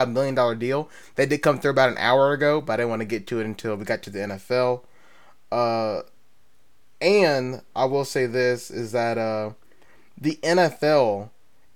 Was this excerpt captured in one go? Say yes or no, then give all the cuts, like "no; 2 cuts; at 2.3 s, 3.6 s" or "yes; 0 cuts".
yes; 0 cuts